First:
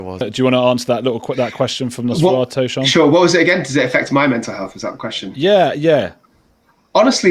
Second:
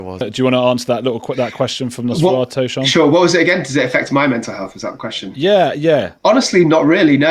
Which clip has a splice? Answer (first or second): second